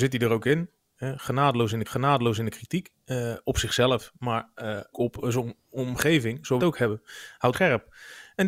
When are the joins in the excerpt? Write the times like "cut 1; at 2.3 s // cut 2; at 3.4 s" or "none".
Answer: cut 1; at 1.8 s // cut 2; at 4.9 s // cut 3; at 6.6 s // cut 4; at 7.5 s